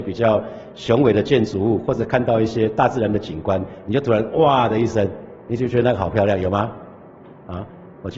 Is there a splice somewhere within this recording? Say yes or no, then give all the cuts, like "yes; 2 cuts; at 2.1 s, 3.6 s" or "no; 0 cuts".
no; 0 cuts